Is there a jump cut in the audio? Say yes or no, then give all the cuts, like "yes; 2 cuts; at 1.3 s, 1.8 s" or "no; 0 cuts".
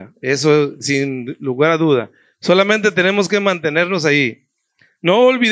no; 0 cuts